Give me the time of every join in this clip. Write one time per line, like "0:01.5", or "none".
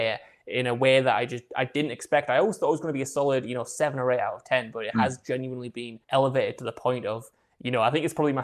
0:06.0